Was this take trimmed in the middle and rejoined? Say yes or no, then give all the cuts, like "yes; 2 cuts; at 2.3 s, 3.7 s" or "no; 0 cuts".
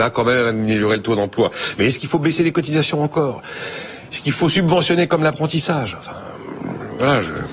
no; 0 cuts